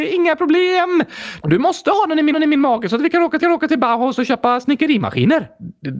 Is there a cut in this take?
yes; 2 cuts; at 2.3 s, 3.4 s

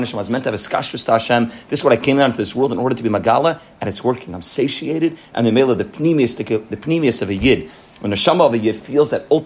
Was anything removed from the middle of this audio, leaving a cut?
no; 0 cuts

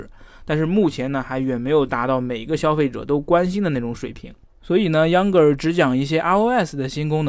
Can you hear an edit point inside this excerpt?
no; 0 cuts

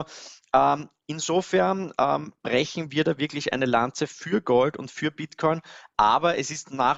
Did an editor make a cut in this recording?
no; 0 cuts

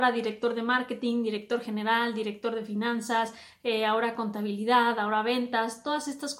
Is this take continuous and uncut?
yes; 0 cuts

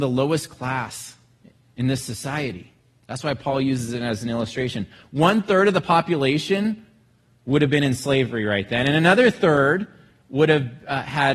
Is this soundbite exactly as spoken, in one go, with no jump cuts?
yes; 0 cuts

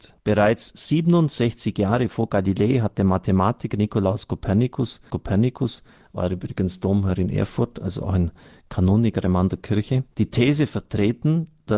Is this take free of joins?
no; 1 cut; at 5.1 s

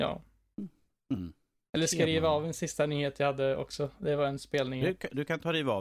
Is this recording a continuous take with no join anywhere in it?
yes; 0 cuts

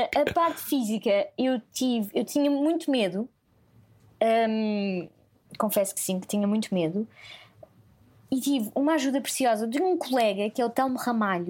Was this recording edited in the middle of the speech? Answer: no; 0 cuts

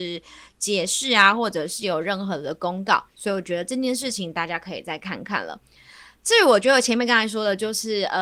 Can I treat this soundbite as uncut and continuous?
no; 1 cut; at 3.1 s

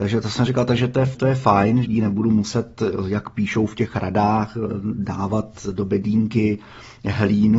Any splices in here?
yes; 2 cuts; at 1.1 s, 1.8 s

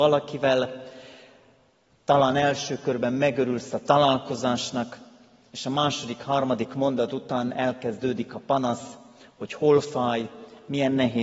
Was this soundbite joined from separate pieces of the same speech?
no; 0 cuts

